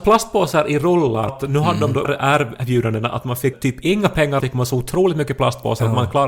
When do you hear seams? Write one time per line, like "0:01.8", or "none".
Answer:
0:01.3
0:02.0
0:03.5
0:04.4